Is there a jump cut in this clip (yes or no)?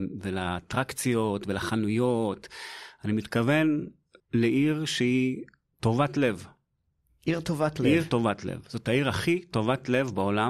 no